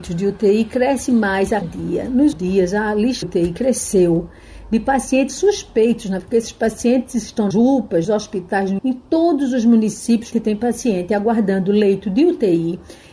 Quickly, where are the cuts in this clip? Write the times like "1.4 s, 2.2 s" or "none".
1.6 s, 2.3 s, 3.2 s, 5.3 s, 6.2 s, 7.5 s, 8.0 s, 8.8 s, 10.3 s

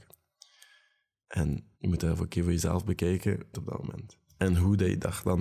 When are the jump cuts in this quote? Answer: 1.7 s, 3.5 s

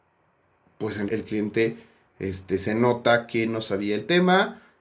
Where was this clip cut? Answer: 1.1 s

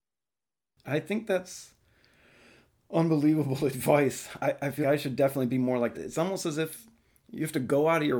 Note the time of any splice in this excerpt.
4.4 s, 4.8 s, 5.9 s

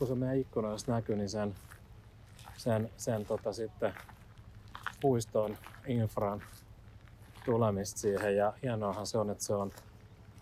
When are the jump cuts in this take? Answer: none

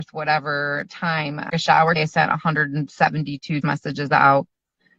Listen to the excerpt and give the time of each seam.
1.5 s, 2.0 s, 3.6 s

